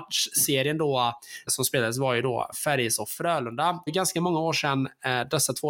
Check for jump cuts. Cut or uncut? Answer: cut